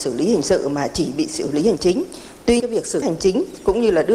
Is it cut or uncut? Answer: cut